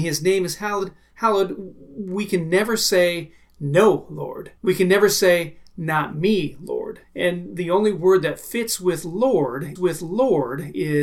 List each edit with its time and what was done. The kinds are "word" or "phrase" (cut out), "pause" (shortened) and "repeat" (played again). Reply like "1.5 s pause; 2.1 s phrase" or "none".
4.6 s pause; 7.0 s pause; 9.8 s repeat